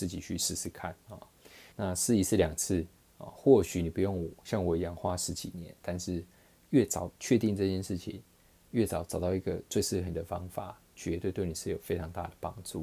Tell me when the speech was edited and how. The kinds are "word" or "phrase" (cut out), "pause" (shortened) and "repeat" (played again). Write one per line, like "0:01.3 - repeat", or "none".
0:01.7 - pause
0:07.1 - pause